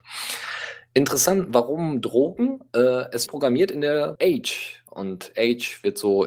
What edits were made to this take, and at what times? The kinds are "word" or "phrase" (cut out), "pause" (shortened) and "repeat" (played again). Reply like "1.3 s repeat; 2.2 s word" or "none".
3.3 s word; 4.2 s word